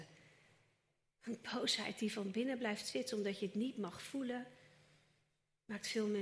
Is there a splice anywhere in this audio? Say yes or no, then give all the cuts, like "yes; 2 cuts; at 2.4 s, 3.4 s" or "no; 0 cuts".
yes; 1 cut; at 3.4 s